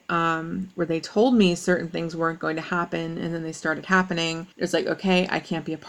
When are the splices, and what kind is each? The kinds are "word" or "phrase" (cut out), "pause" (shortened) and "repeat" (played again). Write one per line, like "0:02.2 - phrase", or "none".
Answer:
0:04.5 - pause

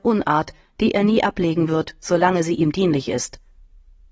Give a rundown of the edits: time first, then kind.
none

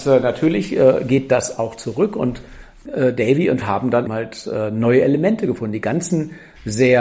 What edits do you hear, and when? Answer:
0:02.9 - word
0:03.6 - word
0:04.1 - word

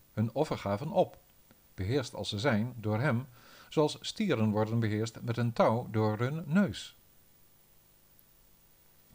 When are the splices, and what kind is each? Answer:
none

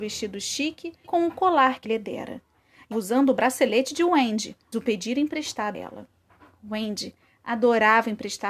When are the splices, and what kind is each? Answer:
0:01.0 - word
0:01.8 - word
0:02.9 - word
0:04.7 - word
0:05.7 - word

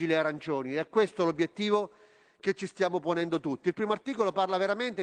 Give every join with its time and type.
none

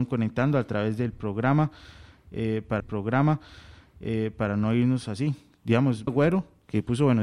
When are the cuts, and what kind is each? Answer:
0:02.8 - repeat
0:06.1 - word

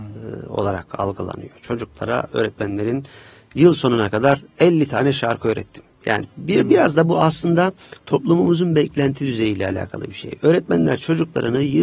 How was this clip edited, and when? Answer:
0:07.8 - pause

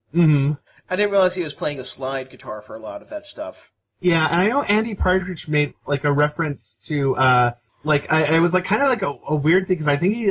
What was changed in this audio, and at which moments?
none

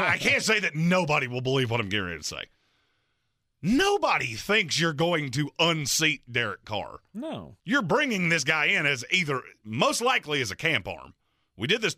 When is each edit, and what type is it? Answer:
0:07.6 - pause

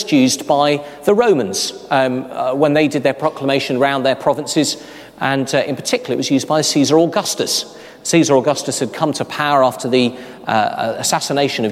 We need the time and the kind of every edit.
none

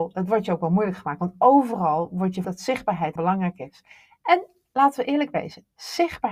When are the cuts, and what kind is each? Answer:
0:02.4 - word
0:03.2 - word

